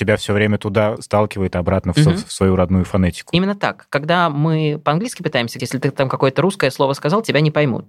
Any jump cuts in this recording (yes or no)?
yes